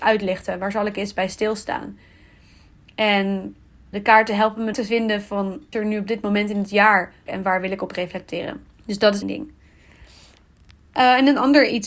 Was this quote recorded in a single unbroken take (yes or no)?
no